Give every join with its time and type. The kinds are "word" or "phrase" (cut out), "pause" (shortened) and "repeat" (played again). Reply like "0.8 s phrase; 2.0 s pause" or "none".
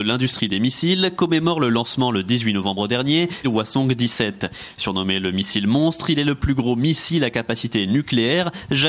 3.4 s phrase